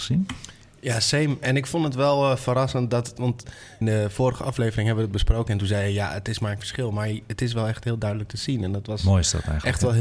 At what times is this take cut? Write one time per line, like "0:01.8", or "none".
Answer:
0:03.8
0:06.6